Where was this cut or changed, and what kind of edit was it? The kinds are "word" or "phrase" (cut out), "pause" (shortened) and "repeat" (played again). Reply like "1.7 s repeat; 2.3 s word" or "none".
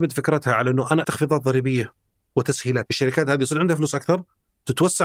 1.0 s word; 2.9 s word